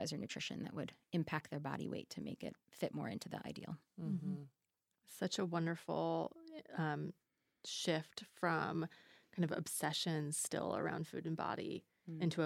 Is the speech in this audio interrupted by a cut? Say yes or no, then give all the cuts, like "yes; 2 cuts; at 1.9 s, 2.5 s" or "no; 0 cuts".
no; 0 cuts